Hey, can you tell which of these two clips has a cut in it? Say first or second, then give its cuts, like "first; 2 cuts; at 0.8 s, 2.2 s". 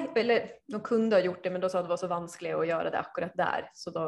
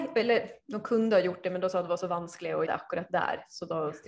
second; 1 cut; at 2.7 s